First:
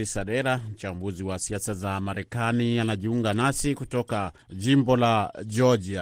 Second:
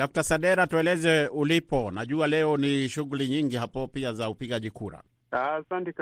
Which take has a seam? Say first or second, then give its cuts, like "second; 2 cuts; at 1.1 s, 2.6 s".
first; 1 cut; at 4.4 s